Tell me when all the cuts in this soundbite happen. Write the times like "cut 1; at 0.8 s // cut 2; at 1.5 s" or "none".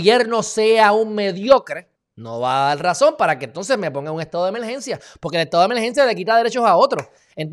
cut 1; at 1.9 s